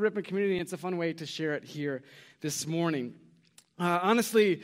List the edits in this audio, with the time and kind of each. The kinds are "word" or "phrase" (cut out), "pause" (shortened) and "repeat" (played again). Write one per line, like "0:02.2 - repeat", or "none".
none

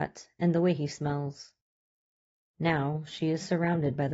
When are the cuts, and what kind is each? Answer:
none

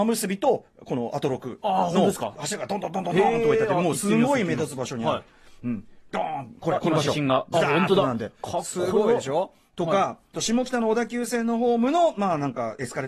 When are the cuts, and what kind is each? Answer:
0:10.3 - phrase

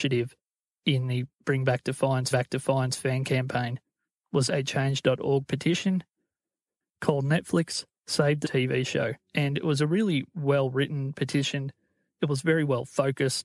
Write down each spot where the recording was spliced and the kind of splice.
0:01.3 - pause
0:02.3 - repeat
0:04.5 - word
0:08.0 - pause
0:08.4 - word
0:09.2 - pause

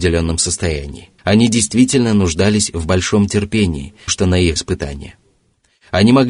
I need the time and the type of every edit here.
0:01.2 - pause
0:04.1 - word
0:04.6 - phrase

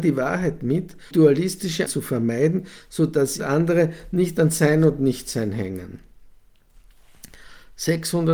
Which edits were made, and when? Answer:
0:01.1 - word
0:01.9 - word
0:03.4 - phrase

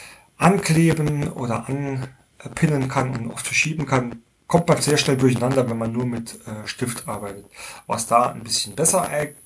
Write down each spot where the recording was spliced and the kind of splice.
0:04.4 - pause

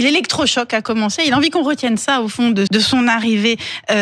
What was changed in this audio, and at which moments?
0:02.7 - word

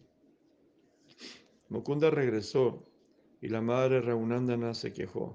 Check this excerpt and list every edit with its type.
none

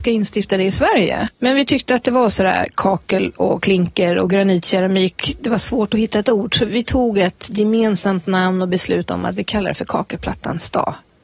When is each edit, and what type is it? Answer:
0:06.7 - word

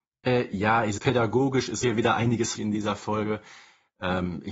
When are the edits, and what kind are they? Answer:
0:01.0 - word
0:01.8 - word
0:02.6 - word

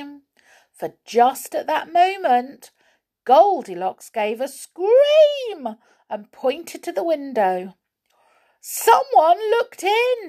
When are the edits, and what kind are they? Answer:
none

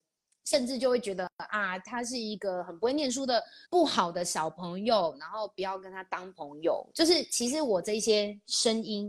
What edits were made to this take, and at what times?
0:03.6 - pause

